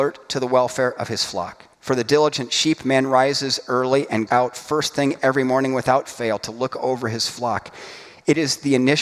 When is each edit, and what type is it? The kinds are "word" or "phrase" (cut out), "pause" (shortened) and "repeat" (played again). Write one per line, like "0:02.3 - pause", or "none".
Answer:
0:01.7 - pause
0:04.3 - word

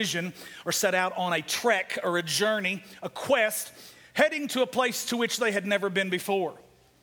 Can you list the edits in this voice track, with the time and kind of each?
none

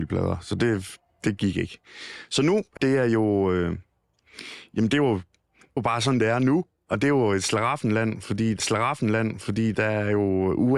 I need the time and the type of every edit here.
0:01.1 - pause
0:02.8 - phrase
0:05.8 - word
0:08.6 - repeat

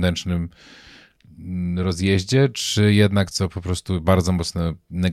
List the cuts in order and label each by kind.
0:03.3 - word

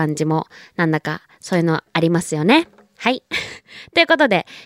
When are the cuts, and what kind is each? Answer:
none

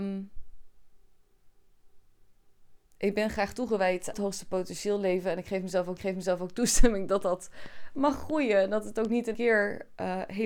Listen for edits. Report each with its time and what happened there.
0:02.9 - pause
0:04.1 - phrase
0:06.0 - repeat
0:09.3 - word

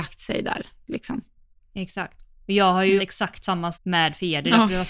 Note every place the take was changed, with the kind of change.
0:02.3 - pause
0:03.0 - word
0:03.7 - word

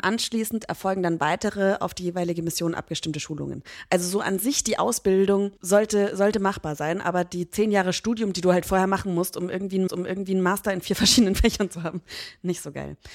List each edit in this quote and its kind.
0:05.6 - pause
0:09.9 - repeat

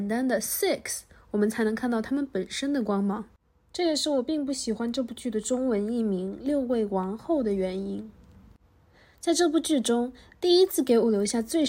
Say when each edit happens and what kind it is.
none

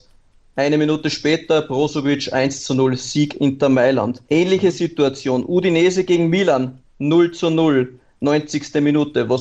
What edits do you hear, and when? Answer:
0:04.2 - pause
0:06.9 - pause

